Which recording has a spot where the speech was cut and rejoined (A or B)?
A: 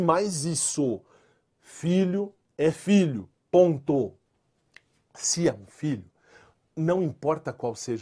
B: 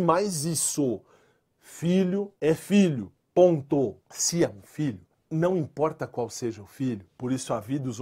B